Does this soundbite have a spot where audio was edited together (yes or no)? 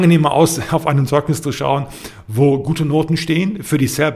no